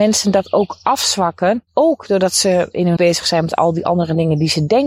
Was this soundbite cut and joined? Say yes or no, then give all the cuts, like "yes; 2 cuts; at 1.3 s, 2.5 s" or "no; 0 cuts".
yes; 2 cuts; at 1.7 s, 3.0 s